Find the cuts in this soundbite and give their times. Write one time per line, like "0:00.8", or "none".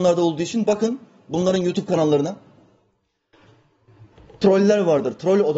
none